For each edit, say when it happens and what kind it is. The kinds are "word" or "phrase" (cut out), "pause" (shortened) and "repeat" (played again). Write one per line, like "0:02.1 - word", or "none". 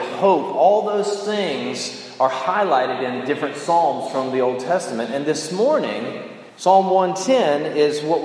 0:06.5 - pause